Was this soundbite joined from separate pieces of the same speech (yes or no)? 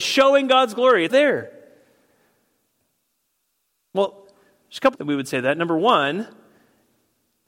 yes